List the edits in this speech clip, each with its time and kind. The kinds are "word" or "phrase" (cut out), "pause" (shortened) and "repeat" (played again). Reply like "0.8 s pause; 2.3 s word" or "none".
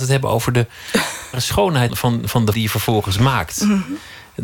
1.3 s word; 1.9 s word; 2.5 s word